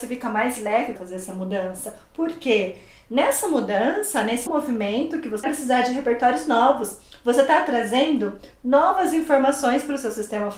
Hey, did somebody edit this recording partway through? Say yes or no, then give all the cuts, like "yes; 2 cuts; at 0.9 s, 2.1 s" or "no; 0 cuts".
yes; 3 cuts; at 1.0 s, 4.5 s, 5.4 s